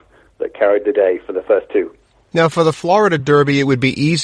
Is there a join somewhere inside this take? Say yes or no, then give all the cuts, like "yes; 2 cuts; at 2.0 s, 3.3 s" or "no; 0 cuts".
no; 0 cuts